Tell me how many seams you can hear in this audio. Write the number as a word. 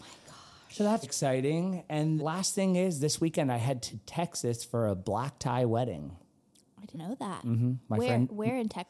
three